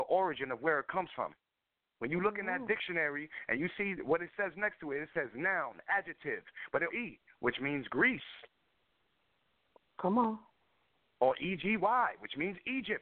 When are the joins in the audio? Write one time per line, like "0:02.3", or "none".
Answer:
0:01.5
0:06.9